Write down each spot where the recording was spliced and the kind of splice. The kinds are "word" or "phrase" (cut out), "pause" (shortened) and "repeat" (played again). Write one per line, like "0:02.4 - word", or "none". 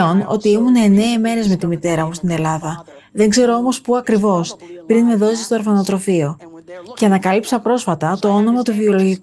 none